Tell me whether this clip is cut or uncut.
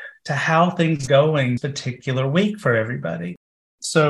cut